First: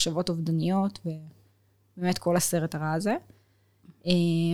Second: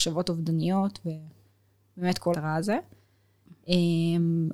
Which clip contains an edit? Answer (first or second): second